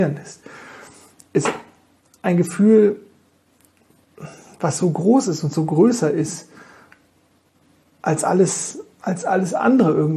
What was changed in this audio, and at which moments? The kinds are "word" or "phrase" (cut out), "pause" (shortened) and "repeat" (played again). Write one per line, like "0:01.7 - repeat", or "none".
none

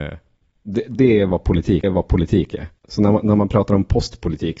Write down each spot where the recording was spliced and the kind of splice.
0:01.8 - repeat

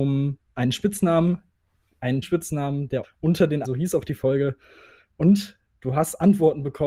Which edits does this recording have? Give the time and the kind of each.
0:02.2 - word
0:03.0 - word
0:03.6 - word

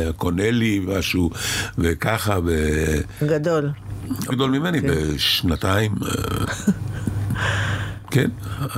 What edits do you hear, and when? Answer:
0:04.3 - word

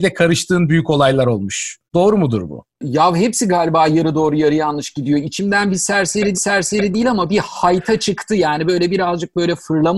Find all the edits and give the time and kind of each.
0:01.9 - pause
0:06.3 - repeat

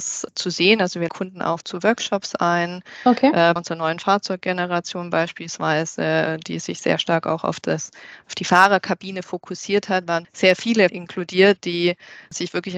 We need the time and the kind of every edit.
0:01.1 - phrase
0:01.6 - word
0:03.6 - word
0:10.2 - word
0:10.9 - phrase

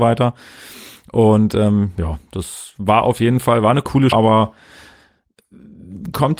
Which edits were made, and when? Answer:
0:04.1 - word

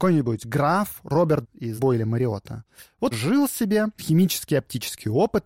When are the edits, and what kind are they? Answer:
0:01.4 - word
0:01.8 - word
0:03.1 - word
0:04.0 - word

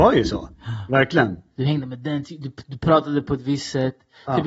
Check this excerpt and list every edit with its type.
none

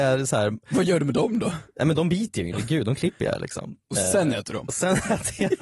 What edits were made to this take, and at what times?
0:02.5 - phrase
0:03.8 - pause

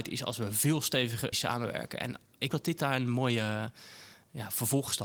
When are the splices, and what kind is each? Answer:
0:01.3 - word
0:02.5 - word

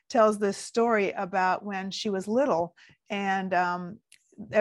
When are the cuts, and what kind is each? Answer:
none

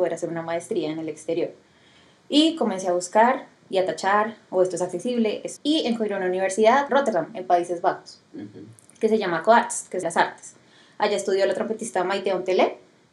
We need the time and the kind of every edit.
0:05.6 - word
0:06.9 - word
0:10.0 - phrase

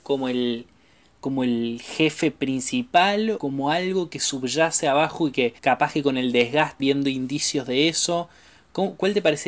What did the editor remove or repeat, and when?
0:03.4 - word
0:05.6 - pause
0:06.8 - phrase

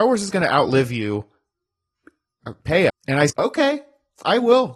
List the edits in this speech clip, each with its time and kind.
0:02.9 - word
0:03.3 - word

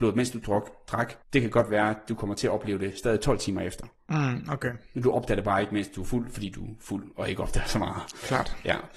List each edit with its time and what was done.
0:01.2 - pause

